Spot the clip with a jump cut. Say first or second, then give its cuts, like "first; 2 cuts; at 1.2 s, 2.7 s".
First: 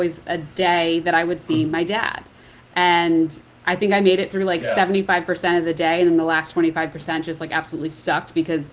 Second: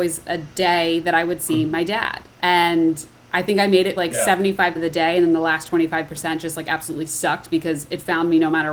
second; 3 cuts; at 2.3 s, 4.0 s, 4.8 s